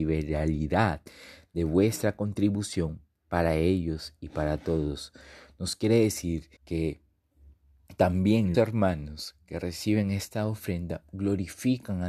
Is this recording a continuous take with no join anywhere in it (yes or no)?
no